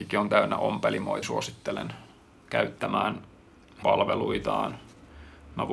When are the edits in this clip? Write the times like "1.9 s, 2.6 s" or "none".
1.2 s, 3.8 s